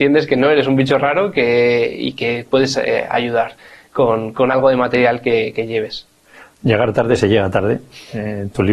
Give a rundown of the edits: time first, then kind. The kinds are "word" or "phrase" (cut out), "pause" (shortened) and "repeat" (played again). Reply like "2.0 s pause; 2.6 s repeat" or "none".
none